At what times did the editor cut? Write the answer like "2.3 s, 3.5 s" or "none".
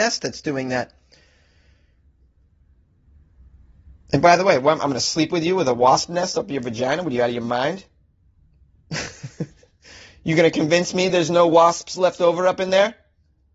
none